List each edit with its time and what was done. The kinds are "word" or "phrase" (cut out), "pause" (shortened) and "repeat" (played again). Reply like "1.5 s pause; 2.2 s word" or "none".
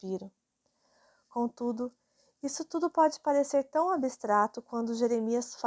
none